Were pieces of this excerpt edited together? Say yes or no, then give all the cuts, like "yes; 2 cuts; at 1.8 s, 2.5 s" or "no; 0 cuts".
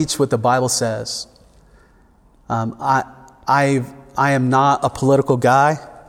no; 0 cuts